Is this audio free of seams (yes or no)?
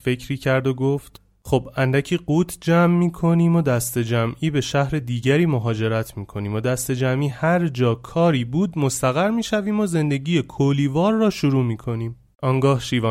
yes